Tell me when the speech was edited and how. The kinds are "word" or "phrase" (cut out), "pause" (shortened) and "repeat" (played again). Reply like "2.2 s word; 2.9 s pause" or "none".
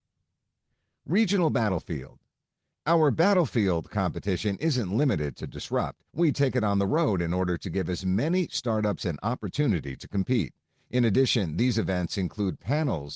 6.1 s pause